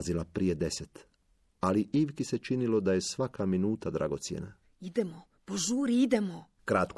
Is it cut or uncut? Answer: uncut